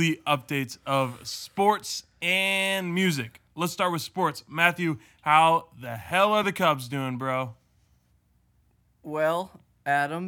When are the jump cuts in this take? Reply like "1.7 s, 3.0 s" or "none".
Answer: none